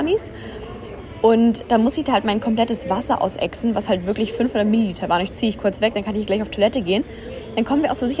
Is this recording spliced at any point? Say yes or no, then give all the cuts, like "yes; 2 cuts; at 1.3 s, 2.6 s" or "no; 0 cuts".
yes; 1 cut; at 5.3 s